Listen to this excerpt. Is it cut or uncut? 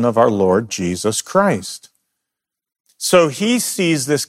uncut